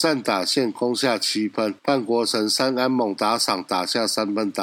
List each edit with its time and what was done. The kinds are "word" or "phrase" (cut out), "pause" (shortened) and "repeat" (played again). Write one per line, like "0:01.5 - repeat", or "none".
0:01.8 - pause